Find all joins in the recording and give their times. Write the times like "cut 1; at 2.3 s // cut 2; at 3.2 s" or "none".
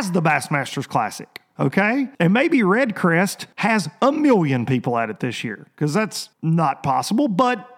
cut 1; at 2.1 s // cut 2; at 3.5 s // cut 3; at 6.3 s